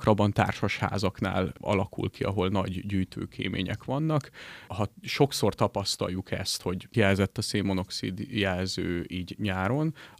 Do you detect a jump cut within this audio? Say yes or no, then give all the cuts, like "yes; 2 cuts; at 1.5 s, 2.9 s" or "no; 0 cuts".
yes; 1 cut; at 6.9 s